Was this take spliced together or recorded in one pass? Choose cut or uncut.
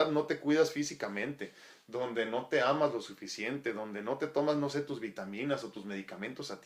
uncut